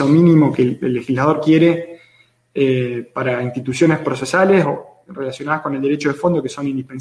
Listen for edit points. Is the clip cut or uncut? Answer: uncut